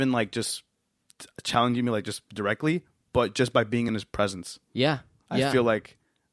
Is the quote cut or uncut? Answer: uncut